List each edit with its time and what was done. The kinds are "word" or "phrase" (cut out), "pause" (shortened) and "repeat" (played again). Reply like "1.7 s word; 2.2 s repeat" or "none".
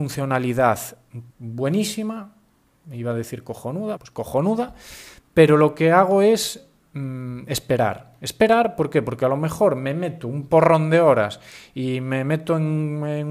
1.3 s pause; 4.0 s word